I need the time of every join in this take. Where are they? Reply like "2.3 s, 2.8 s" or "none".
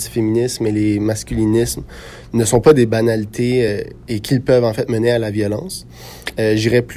none

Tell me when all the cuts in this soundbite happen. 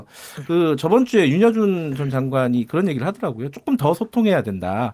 none

